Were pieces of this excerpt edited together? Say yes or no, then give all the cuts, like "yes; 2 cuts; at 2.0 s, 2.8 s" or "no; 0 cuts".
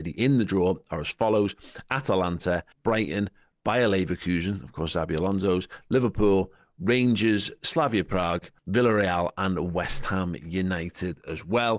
yes; 2 cuts; at 2.7 s, 8.6 s